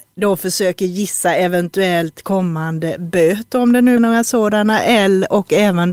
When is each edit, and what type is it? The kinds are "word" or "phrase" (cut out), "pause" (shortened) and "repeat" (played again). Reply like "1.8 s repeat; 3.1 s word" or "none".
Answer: 4.0 s word